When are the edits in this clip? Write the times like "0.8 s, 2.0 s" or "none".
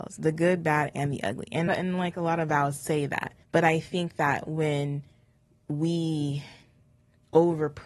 1.7 s, 3.4 s

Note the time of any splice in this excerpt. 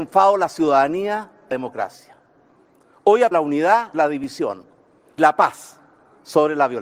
1.5 s, 3.3 s, 3.9 s, 5.2 s

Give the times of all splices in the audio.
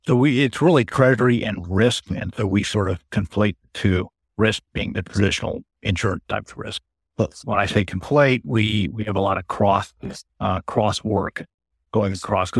10.3 s

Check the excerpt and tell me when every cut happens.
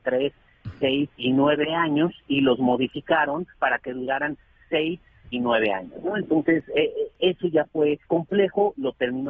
1.1 s, 3.5 s, 5.3 s, 8.0 s

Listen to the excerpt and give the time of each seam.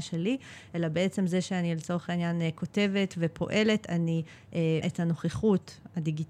4.8 s

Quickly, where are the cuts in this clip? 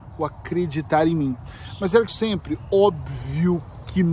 2.1 s

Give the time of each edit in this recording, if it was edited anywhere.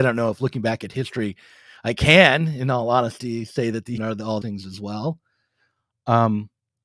4.0 s, 4.4 s

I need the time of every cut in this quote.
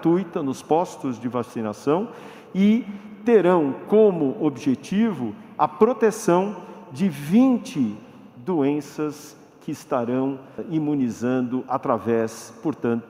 none

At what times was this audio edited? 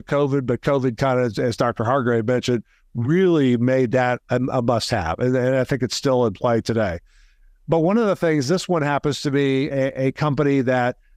none

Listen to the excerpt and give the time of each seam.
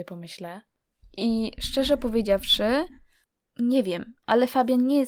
3.2 s

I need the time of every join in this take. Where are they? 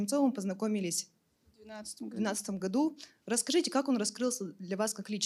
none

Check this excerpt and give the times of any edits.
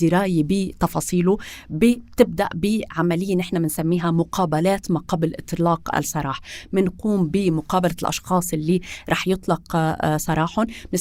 none

